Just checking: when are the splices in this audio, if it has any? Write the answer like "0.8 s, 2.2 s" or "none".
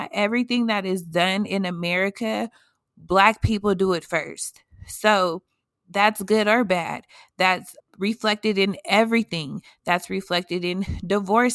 7.8 s

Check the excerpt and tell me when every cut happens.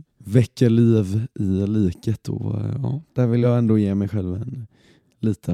none

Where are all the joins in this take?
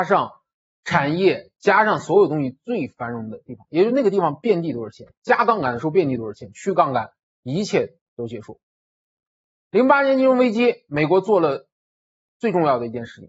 none

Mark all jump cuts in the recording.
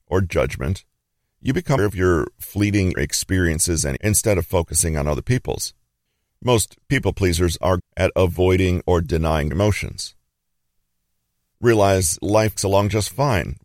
1.8 s, 2.9 s, 4.0 s, 7.8 s, 9.5 s, 12.2 s, 12.6 s

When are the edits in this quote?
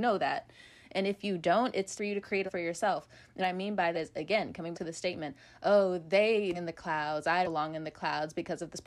2.0 s, 2.5 s, 3.4 s, 3.9 s, 4.7 s, 6.5 s, 7.4 s

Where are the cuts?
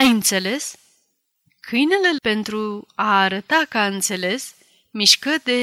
2.2 s

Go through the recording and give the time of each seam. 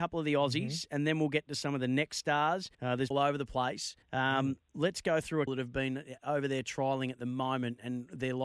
2.7 s, 3.1 s, 4.0 s, 4.6 s, 5.5 s

